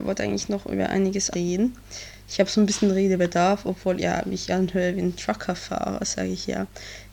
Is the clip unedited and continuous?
no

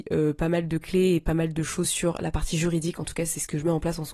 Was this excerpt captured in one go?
yes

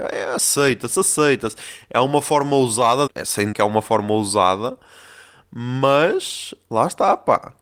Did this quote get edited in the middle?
yes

